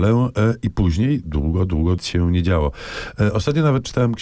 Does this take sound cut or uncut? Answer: cut